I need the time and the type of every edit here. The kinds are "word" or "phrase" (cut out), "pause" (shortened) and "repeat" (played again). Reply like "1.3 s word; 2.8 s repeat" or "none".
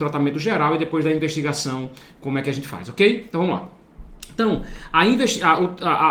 none